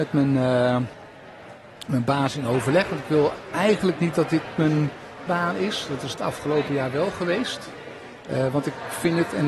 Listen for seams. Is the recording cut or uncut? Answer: cut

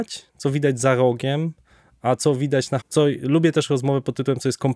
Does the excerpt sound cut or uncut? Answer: cut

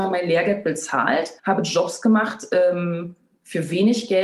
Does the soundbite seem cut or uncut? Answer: cut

